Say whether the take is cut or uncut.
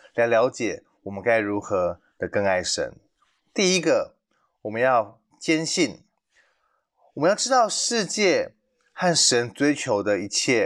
uncut